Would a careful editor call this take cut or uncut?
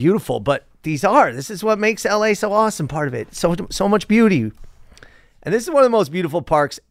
uncut